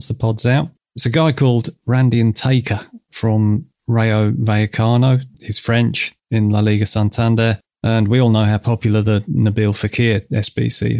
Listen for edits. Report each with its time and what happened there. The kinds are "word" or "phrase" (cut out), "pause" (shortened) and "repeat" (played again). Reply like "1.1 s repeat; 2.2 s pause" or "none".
6.2 s pause